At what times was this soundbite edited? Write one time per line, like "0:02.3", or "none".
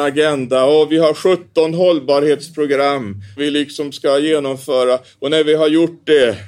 0:03.4